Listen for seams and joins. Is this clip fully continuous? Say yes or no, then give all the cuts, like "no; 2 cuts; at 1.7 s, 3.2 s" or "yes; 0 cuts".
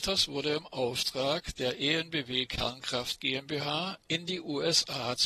yes; 0 cuts